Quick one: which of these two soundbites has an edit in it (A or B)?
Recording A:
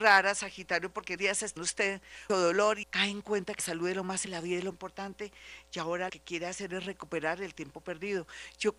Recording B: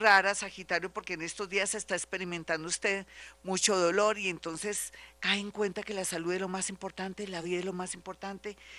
A